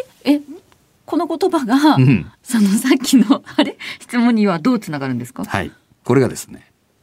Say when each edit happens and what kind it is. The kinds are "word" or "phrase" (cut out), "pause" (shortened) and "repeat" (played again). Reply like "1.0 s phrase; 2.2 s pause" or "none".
none